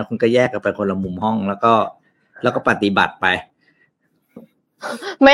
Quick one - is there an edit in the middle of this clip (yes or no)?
no